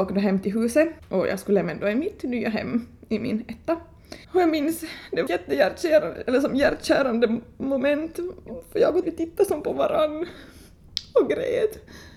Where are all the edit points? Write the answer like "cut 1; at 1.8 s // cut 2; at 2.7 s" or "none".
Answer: cut 1; at 1.0 s // cut 2; at 4.2 s // cut 3; at 5.3 s // cut 4; at 9.0 s